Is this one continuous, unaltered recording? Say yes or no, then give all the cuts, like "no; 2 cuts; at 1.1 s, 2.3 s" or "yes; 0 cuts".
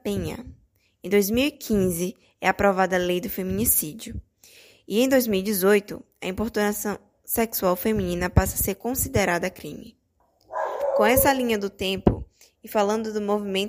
yes; 0 cuts